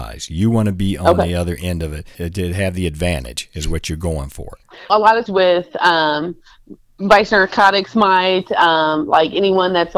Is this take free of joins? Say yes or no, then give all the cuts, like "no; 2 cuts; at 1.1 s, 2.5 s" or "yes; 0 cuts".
no; 3 cuts; at 2.1 s, 4.9 s, 5.3 s